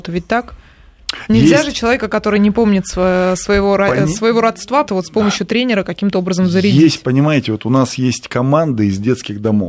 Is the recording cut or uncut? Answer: cut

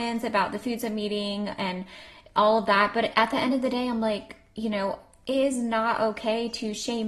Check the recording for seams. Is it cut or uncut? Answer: uncut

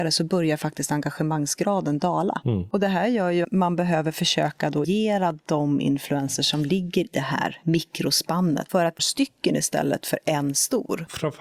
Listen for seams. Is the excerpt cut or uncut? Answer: cut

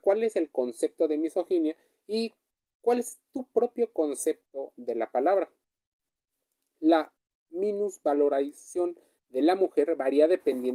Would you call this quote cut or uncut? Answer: uncut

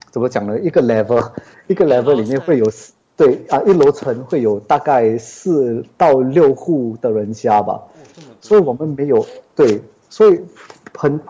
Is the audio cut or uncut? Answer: uncut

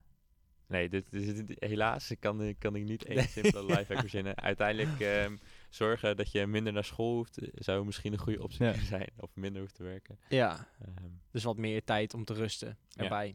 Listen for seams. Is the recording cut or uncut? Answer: uncut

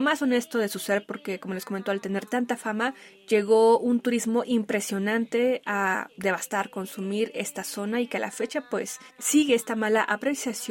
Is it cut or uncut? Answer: uncut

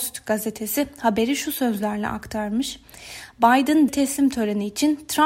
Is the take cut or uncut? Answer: cut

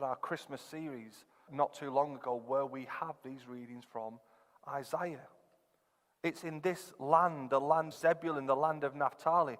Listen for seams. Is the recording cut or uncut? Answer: cut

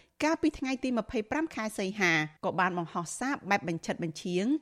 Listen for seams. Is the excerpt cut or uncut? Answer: cut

